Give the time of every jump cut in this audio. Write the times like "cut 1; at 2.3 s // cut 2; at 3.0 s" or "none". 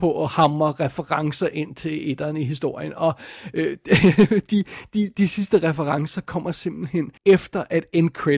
cut 1; at 7.2 s